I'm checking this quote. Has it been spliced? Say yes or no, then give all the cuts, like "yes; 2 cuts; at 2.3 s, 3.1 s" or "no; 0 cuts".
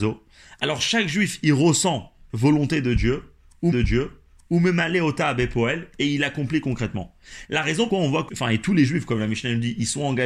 yes; 4 cuts; at 2.3 s, 3.7 s, 7.9 s, 8.3 s